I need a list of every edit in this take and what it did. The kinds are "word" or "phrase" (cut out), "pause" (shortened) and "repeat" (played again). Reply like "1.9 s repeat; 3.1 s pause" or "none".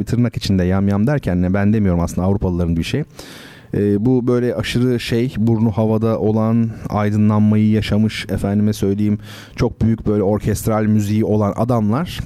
2.8 s word